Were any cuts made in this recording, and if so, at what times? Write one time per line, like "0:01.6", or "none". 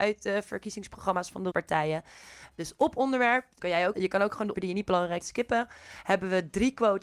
0:01.5
0:03.6
0:03.9
0:04.5
0:05.2